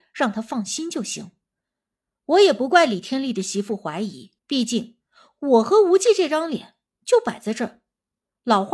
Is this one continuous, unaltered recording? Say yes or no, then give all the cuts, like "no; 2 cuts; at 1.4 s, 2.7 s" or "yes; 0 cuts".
no; 2 cuts; at 1.4 s, 4.4 s